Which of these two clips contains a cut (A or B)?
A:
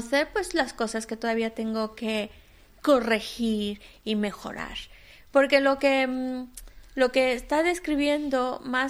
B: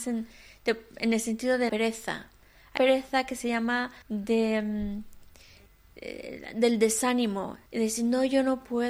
B